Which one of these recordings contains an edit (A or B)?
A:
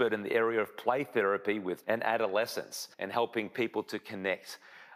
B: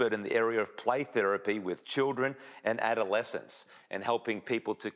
A